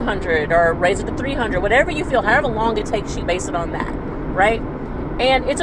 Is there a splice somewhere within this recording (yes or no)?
no